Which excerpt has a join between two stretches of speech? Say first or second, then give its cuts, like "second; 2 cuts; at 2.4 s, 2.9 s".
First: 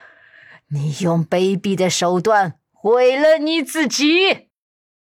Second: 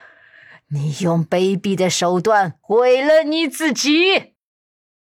second; 1 cut; at 2.6 s